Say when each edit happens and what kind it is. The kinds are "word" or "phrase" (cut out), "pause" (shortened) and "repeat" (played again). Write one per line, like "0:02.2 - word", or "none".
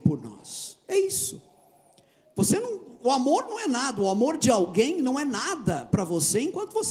none